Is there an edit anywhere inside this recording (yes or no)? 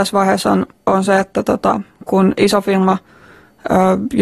no